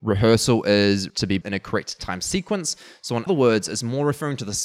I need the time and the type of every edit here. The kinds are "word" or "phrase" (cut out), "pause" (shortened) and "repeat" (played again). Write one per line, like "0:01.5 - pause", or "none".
0:01.1 - word
0:01.4 - word
0:03.3 - word

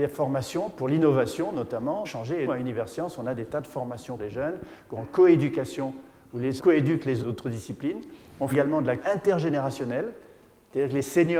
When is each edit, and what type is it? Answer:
0:02.0 - word
0:02.5 - word
0:04.2 - word
0:05.0 - word
0:06.6 - word
0:07.2 - word
0:08.5 - word
0:09.0 - word

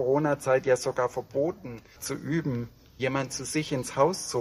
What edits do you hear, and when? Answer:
0:02.0 - word
0:03.0 - word

